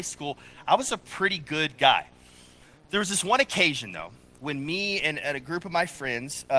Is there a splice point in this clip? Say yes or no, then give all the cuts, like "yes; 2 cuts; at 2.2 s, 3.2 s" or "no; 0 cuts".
no; 0 cuts